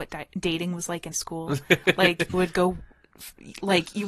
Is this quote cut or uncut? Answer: cut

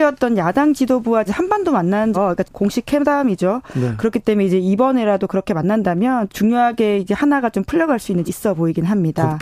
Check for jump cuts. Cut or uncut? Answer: cut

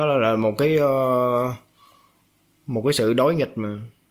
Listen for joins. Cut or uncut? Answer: uncut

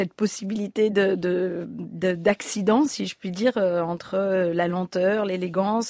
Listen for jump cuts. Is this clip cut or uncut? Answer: uncut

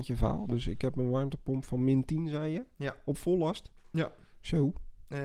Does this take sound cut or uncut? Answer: uncut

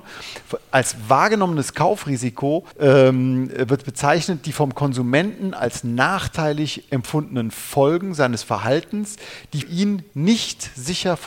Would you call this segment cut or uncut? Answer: cut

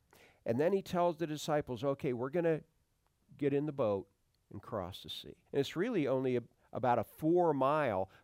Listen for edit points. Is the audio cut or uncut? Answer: cut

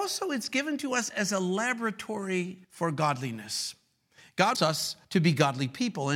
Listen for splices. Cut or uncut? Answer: cut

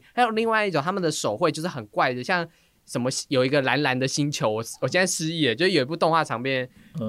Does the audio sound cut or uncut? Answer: uncut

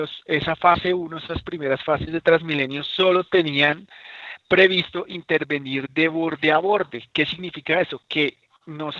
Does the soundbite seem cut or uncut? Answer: uncut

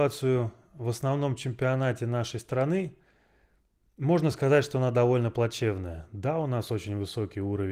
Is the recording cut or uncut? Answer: uncut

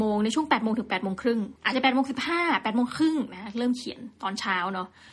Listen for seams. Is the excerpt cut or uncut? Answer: cut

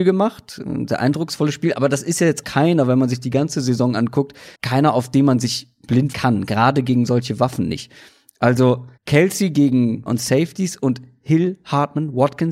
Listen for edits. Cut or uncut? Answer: cut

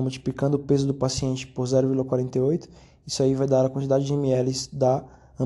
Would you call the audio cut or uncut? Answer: uncut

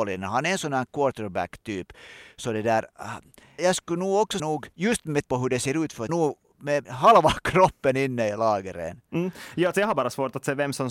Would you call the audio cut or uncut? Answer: cut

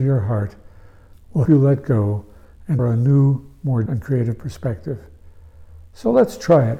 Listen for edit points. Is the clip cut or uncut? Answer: cut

